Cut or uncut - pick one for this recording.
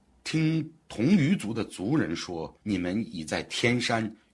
cut